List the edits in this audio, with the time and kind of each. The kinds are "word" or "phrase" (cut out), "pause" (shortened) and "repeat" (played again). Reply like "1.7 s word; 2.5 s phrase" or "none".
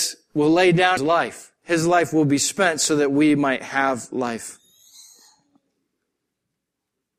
1.0 s word